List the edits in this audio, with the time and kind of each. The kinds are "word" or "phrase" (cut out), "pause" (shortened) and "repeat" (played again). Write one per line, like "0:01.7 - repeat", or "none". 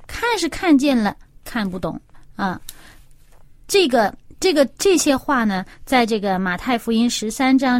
0:04.8 - pause

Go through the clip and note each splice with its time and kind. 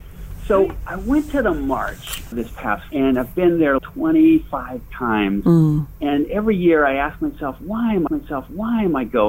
0:02.3 - word
0:02.9 - word
0:03.8 - word
0:08.1 - repeat

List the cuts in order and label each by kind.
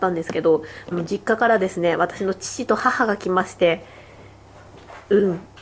0:00.9 - phrase

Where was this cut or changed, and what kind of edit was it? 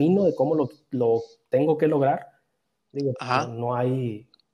none

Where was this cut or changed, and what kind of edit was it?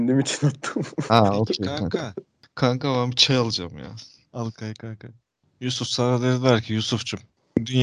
none

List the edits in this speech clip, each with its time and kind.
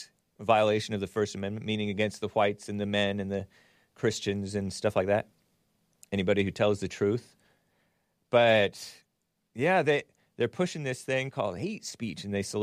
none

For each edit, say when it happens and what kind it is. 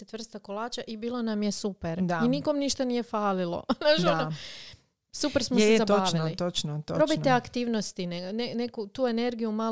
none

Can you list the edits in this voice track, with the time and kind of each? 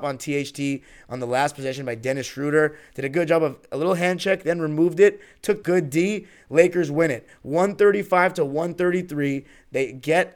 0:05.6 - phrase

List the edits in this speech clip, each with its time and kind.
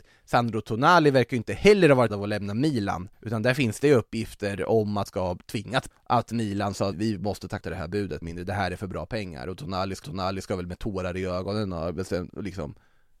0:02.1 - word
0:03.1 - pause
0:05.1 - word
0:05.9 - word
0:06.9 - word
0:07.6 - word
0:08.2 - phrase
0:10.0 - repeat

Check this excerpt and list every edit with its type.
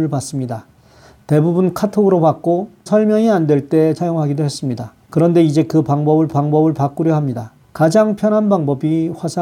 0:02.9 - word
0:04.0 - word
0:05.0 - pause
0:06.3 - repeat
0:07.6 - pause

